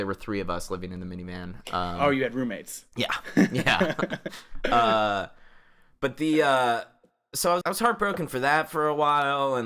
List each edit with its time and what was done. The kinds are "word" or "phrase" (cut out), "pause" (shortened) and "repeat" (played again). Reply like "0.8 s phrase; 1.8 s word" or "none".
7.6 s word